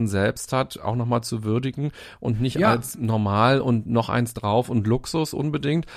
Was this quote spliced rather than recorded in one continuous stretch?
no; 0 cuts

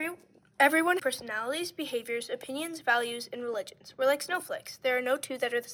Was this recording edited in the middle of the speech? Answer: yes; 1 cut; at 1.0 s

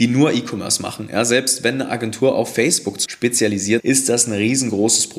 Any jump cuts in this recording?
yes; 2 cuts; at 3.1 s, 3.8 s

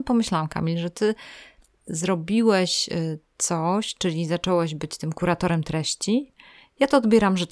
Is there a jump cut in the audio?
no; 0 cuts

